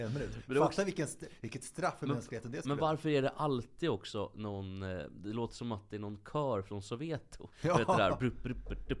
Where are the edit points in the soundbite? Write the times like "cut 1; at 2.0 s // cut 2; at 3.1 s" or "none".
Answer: cut 1; at 7.5 s